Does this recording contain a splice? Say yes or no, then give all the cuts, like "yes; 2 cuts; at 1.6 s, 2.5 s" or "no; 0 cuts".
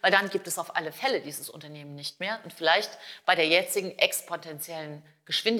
no; 0 cuts